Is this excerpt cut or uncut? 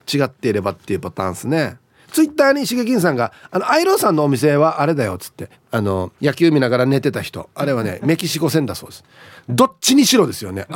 cut